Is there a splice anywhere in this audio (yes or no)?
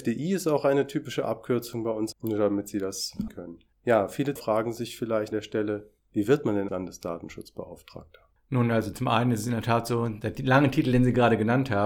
yes